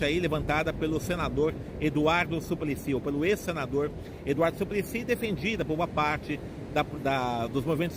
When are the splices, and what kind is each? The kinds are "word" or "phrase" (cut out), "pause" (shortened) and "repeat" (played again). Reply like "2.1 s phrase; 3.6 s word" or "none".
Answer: none